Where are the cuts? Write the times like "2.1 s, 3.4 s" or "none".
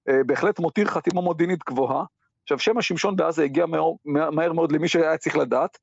none

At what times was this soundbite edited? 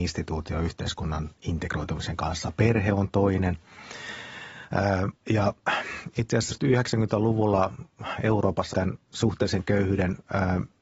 1.4 s, 5.2 s, 6.5 s, 8.7 s

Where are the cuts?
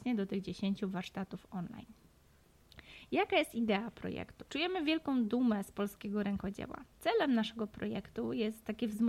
4.5 s, 6.9 s

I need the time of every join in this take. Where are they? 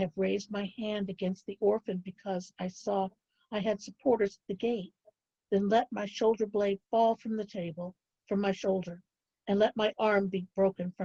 none

